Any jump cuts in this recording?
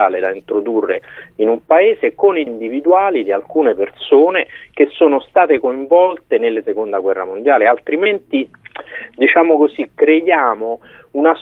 yes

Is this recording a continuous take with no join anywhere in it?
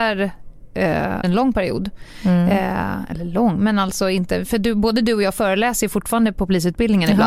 no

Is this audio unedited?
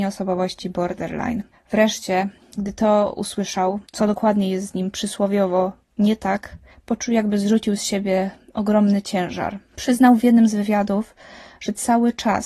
no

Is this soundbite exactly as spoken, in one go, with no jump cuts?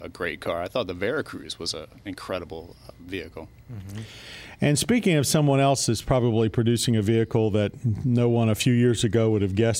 yes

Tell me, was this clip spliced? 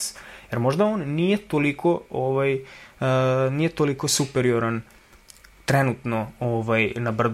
no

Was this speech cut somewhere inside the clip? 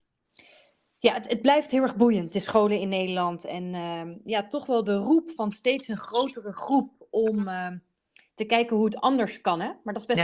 no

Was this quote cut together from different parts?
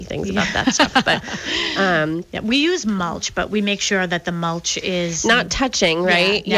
no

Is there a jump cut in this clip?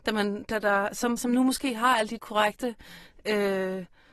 yes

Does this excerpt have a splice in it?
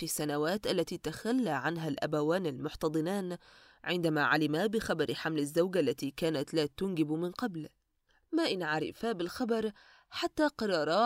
no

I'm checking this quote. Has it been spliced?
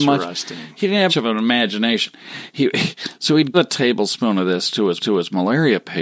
yes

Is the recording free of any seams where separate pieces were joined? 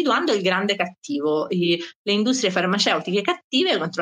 yes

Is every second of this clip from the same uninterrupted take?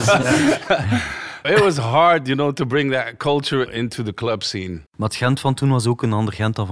no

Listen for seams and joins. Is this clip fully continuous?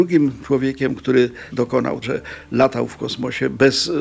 no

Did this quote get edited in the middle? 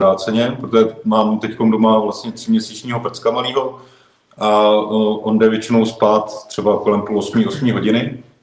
no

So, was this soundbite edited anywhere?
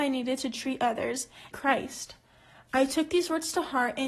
yes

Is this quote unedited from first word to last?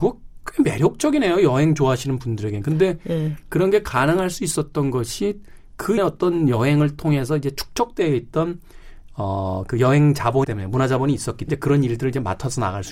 no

